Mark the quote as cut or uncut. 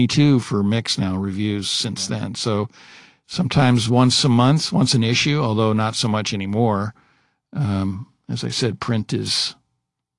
uncut